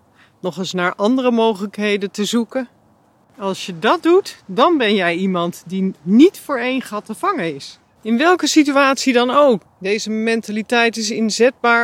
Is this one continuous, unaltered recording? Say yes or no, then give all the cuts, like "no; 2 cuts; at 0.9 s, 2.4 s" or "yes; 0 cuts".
no; 2 cuts; at 4.4 s, 8.0 s